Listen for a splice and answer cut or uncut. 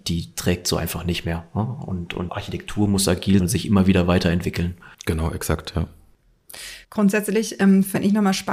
cut